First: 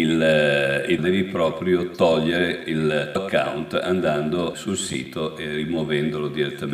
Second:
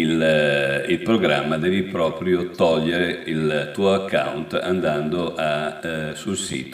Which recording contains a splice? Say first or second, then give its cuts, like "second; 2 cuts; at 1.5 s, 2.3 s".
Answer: first; 3 cuts; at 1.0 s, 3.2 s, 4.5 s